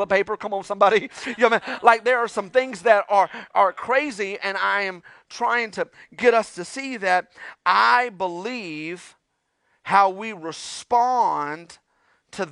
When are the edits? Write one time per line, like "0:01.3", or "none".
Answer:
none